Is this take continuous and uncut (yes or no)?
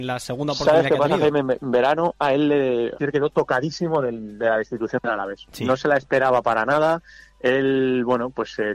no